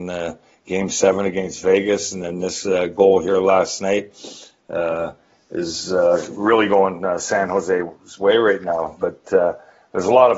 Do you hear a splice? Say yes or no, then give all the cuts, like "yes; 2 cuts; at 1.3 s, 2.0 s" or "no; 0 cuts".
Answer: no; 0 cuts